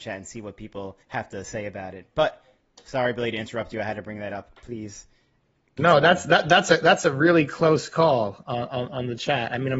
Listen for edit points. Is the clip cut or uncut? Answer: cut